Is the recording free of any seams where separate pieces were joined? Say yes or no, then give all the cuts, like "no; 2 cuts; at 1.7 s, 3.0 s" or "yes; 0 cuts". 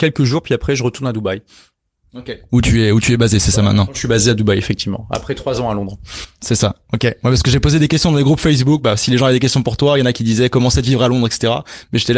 yes; 0 cuts